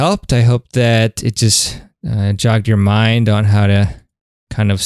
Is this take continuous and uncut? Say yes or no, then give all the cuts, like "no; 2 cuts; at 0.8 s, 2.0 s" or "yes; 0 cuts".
yes; 0 cuts